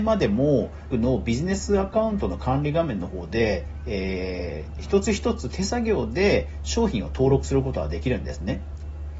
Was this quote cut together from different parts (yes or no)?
yes